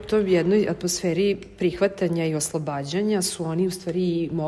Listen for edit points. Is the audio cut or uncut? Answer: uncut